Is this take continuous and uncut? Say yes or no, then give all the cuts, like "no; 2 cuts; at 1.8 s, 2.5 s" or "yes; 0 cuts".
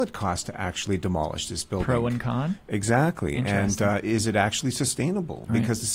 yes; 0 cuts